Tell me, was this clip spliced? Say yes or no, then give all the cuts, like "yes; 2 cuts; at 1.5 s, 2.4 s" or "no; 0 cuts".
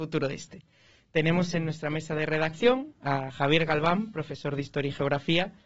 no; 0 cuts